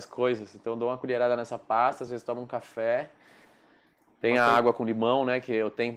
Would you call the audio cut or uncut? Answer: uncut